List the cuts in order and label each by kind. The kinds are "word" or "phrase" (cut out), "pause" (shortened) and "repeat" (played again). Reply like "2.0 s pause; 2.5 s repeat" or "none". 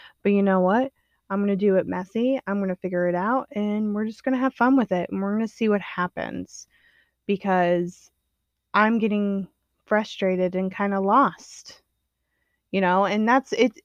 none